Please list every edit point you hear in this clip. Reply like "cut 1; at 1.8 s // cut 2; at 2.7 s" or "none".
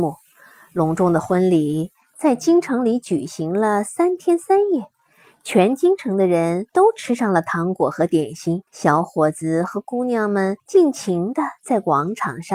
cut 1; at 6.7 s // cut 2; at 8.7 s // cut 3; at 10.6 s